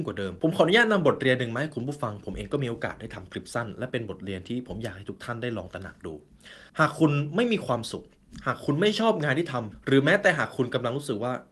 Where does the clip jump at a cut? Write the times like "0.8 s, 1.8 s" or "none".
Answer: 6.7 s